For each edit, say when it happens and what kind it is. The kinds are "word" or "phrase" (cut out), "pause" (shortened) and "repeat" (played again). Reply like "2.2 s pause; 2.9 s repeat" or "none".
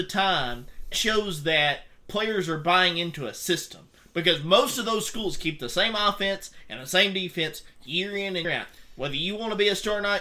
0.9 s word; 8.4 s word